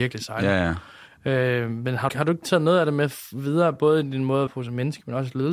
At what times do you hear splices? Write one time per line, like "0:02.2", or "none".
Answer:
0:02.1
0:04.5